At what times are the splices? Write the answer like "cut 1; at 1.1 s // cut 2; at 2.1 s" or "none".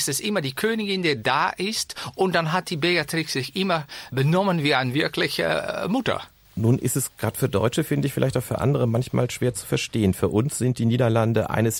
none